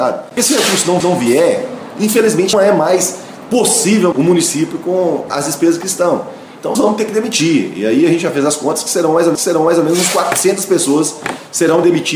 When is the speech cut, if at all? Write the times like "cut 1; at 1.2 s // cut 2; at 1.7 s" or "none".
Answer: cut 1; at 1.0 s // cut 2; at 2.5 s // cut 3; at 4.1 s // cut 4; at 6.7 s // cut 5; at 9.3 s